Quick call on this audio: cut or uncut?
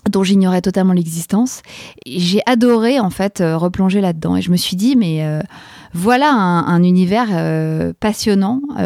uncut